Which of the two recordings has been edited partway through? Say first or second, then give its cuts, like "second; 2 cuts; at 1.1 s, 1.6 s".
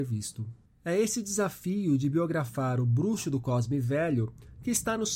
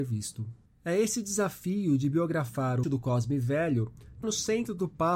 second; 2 cuts; at 2.8 s, 4.2 s